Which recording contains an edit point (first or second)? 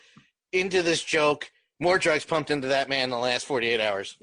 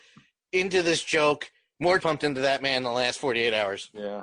second